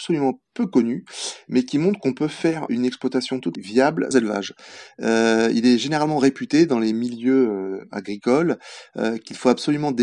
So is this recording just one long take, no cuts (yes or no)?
no